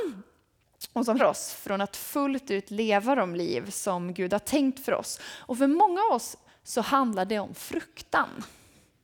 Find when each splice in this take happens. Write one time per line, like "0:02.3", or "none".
0:01.2

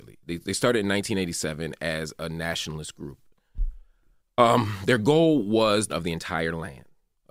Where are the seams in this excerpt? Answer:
0:05.9

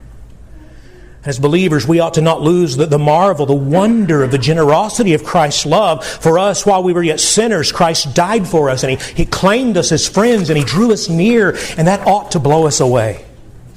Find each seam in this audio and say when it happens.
none

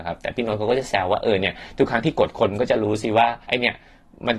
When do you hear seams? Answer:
0:03.4

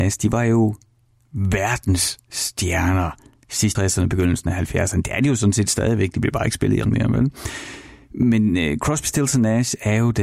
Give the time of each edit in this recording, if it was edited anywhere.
0:03.7
0:06.8

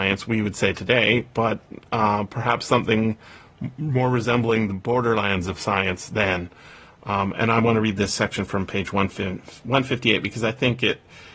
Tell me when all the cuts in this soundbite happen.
none

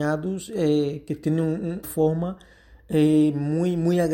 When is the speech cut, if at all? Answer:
0:01.8

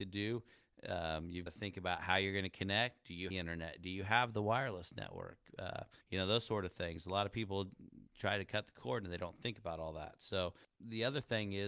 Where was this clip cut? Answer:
0:01.5
0:03.3
0:06.0
0:08.1

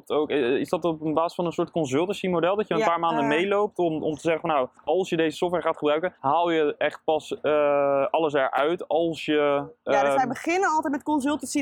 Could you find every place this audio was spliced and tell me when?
0:04.8
0:06.2

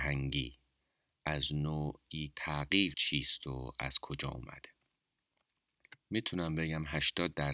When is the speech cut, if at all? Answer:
0:02.3
0:02.9

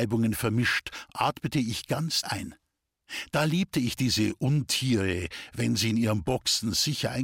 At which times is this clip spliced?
0:02.2

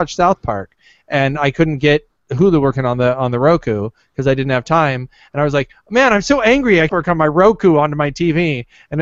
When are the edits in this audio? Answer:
0:06.9

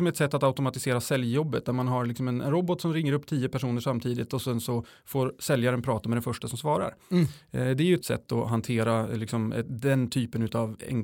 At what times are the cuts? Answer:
0:08.0

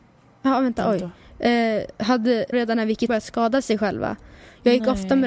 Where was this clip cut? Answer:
0:02.5
0:03.1

